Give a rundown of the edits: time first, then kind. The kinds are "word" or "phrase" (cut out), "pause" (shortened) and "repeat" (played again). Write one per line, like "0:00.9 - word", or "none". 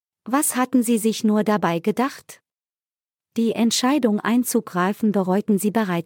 none